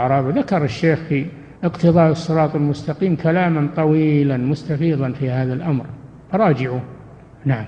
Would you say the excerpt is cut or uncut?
cut